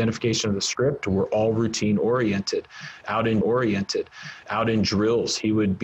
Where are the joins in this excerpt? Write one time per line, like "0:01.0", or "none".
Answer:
0:03.4